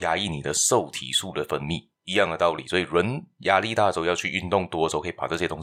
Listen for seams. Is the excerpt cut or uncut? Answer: uncut